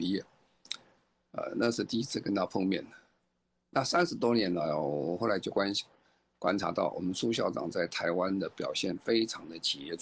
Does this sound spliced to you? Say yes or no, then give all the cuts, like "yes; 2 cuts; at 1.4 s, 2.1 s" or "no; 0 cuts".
no; 0 cuts